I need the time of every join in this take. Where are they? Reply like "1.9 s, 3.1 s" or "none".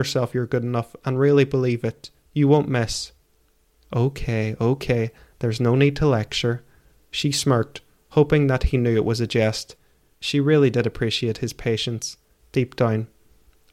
none